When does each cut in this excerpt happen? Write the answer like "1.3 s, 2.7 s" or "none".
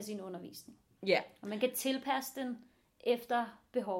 none